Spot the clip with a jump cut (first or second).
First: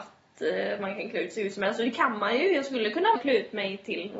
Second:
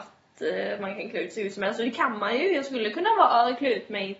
first